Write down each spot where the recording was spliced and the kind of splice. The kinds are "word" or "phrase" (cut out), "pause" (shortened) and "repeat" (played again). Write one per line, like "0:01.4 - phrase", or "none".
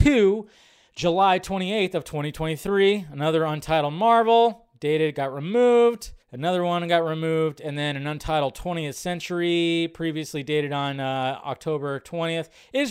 0:06.2 - pause